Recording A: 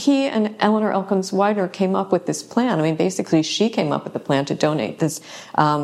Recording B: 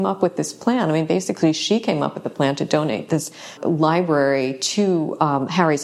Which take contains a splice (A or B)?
B